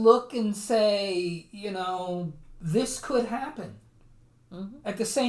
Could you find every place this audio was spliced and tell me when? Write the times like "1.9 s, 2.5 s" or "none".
none